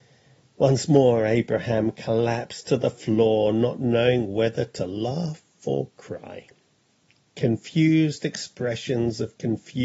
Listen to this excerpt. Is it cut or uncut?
uncut